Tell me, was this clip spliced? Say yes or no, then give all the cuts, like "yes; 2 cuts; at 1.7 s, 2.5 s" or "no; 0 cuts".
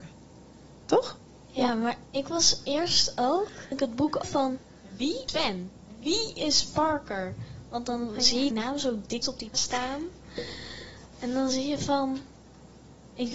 yes; 9 cuts; at 1.3 s, 2.1 s, 3.7 s, 4.2 s, 5.3 s, 8.5 s, 9.2 s, 9.5 s, 11.1 s